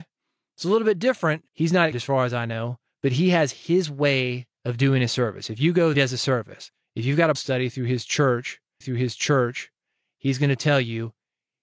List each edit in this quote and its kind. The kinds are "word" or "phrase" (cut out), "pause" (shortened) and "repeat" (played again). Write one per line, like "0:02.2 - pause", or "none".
0:01.5 - pause
0:01.9 - word
0:04.5 - pause
0:05.9 - phrase
0:07.3 - word
0:08.8 - repeat